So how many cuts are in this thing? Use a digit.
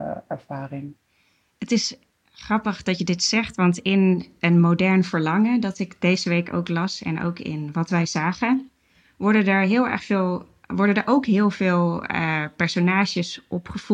0